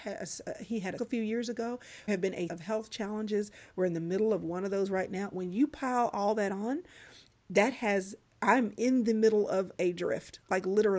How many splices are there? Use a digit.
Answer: 3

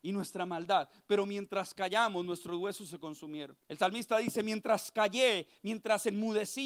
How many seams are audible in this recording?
1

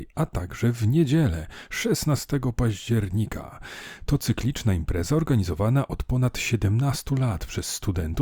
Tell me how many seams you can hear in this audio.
0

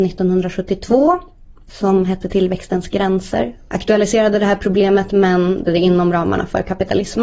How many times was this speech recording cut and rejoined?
2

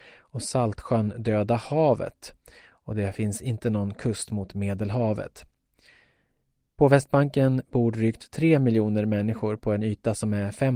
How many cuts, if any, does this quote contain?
0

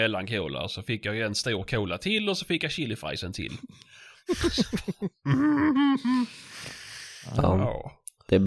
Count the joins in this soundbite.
0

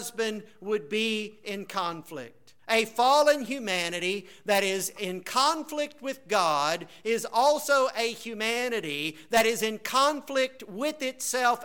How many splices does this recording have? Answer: 1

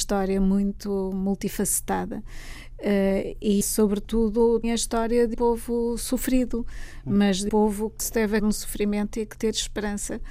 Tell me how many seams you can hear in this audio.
7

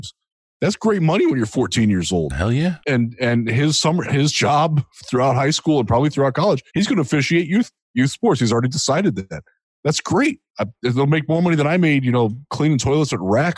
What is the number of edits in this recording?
4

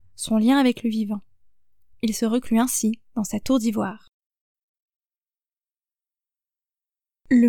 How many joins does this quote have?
0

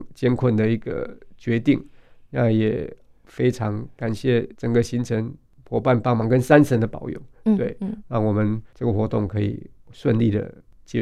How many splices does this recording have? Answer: 2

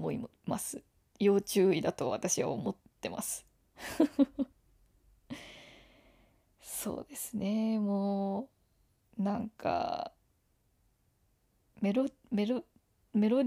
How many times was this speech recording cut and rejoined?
0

